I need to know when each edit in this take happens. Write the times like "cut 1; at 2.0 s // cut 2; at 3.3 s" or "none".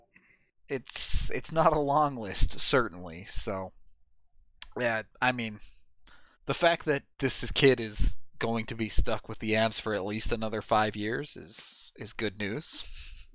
cut 1; at 5.1 s // cut 2; at 6.3 s // cut 3; at 7.1 s